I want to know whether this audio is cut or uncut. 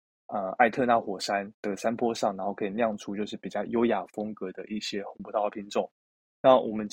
uncut